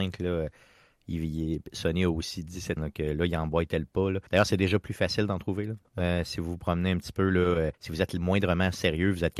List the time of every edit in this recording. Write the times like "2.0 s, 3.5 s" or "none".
2.8 s, 4.3 s, 7.7 s